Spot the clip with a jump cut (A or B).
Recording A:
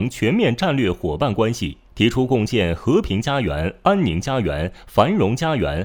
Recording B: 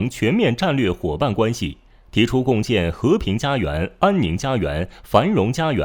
A